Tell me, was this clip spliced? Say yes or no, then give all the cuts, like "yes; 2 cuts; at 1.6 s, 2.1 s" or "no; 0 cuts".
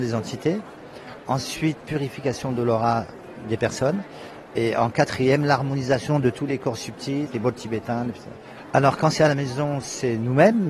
yes; 2 cuts; at 1.8 s, 7.3 s